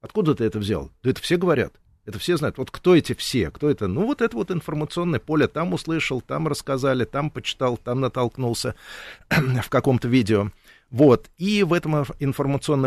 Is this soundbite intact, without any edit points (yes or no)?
yes